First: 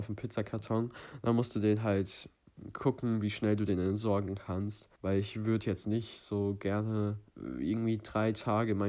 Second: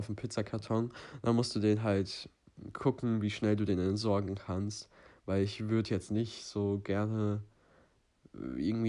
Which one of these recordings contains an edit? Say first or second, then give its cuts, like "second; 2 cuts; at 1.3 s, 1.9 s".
first; 2 cuts; at 5.0 s, 7.3 s